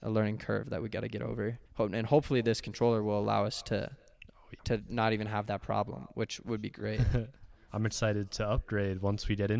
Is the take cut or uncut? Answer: cut